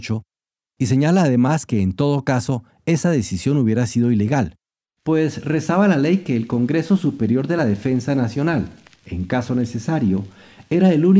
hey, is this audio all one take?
yes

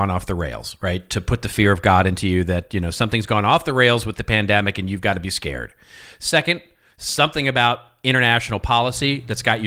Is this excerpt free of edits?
yes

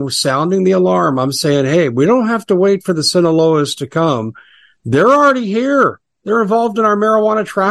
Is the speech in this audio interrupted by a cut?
no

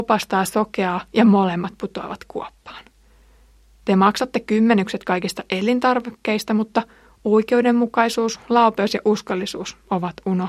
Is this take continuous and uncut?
yes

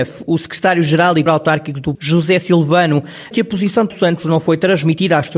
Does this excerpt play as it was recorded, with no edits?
no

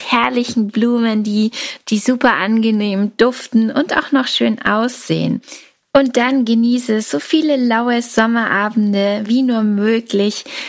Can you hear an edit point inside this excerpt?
no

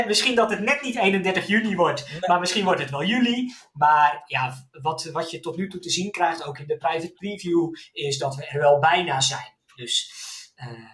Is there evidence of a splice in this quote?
no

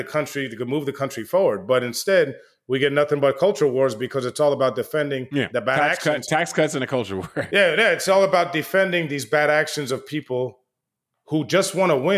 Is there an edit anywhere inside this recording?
no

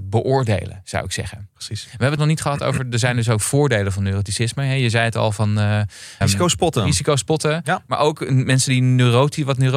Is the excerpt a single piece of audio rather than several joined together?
no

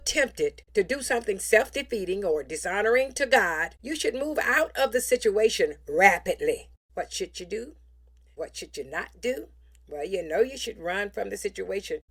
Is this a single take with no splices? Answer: yes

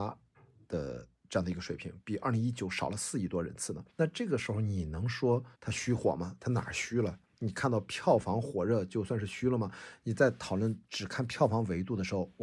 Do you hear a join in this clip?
yes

